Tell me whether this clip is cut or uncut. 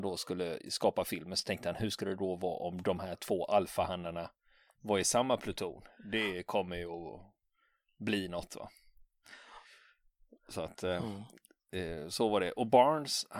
uncut